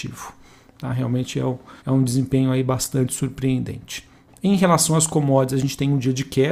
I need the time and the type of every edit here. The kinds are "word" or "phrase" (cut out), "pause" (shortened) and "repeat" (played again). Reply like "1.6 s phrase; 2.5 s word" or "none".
1.8 s pause